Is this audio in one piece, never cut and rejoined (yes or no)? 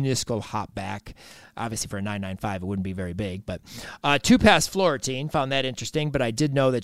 yes